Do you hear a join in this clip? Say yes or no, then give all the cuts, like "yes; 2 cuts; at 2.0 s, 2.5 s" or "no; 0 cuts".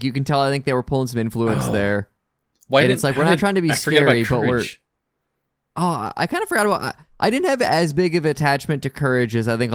no; 0 cuts